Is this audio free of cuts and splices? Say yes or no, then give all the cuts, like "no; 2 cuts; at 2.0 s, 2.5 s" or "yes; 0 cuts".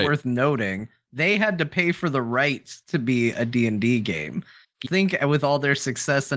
no; 1 cut; at 4.8 s